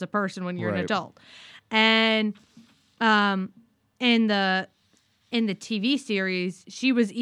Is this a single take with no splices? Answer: yes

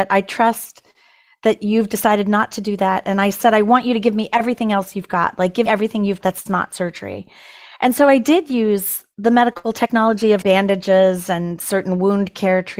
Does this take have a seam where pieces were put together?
yes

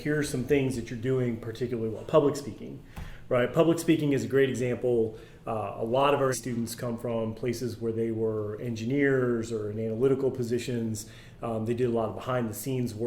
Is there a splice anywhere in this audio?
yes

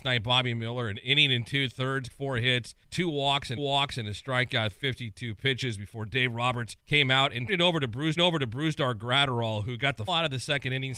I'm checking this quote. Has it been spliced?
yes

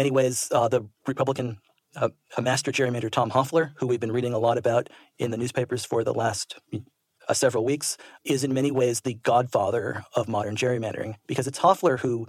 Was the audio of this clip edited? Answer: no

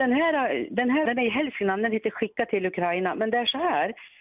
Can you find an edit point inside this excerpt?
yes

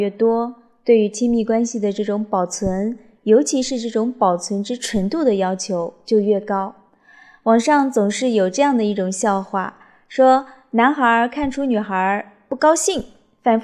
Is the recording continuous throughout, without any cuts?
yes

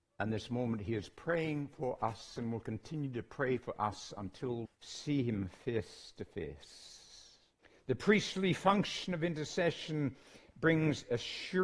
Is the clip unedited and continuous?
no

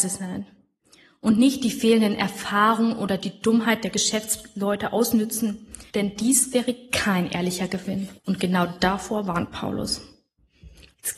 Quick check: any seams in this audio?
yes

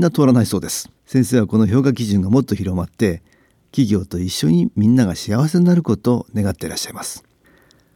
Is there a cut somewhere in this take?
yes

